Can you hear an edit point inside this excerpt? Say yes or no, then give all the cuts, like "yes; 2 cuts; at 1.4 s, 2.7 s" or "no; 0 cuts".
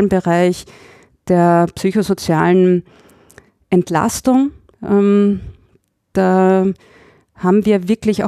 no; 0 cuts